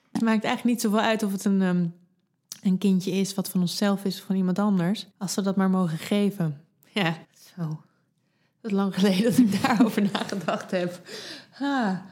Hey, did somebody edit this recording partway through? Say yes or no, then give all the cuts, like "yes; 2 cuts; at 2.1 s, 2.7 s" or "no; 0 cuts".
yes; 2 cuts; at 5.1 s, 7.2 s